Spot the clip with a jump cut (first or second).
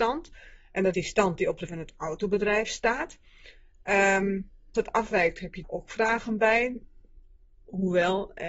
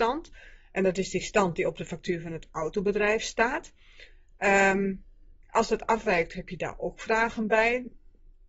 first